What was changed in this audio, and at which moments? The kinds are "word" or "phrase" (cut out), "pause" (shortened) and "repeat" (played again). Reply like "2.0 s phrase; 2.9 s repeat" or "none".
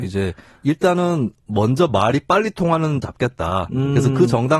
3.0 s phrase